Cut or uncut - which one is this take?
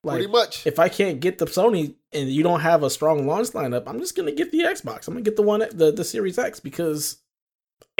uncut